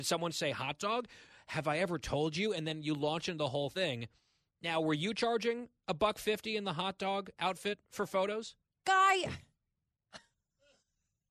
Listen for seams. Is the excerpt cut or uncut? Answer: uncut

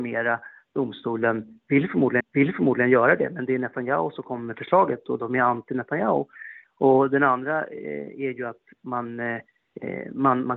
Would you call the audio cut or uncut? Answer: cut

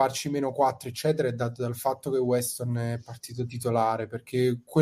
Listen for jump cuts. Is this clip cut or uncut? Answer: uncut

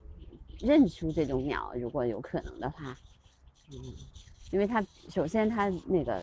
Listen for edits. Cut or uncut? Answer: uncut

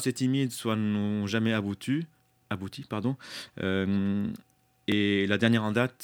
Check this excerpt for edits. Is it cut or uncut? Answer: uncut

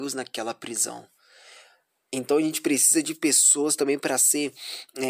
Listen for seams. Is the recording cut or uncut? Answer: uncut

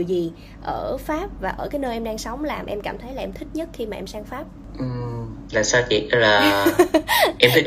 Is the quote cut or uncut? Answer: uncut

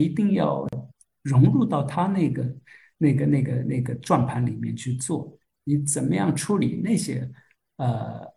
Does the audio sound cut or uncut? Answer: uncut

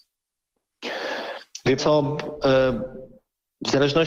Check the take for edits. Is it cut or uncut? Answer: cut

